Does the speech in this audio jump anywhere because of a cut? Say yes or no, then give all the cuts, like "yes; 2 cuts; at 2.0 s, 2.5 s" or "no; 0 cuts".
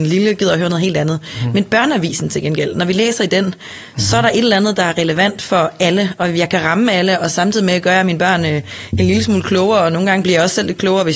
no; 0 cuts